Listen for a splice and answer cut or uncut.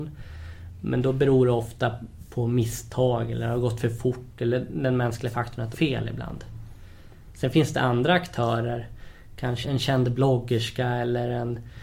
cut